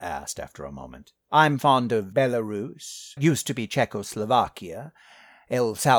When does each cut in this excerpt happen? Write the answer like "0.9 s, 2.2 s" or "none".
1.2 s, 2.1 s, 3.2 s